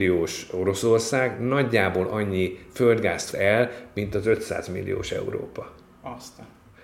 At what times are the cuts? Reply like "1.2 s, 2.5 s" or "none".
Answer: 3.3 s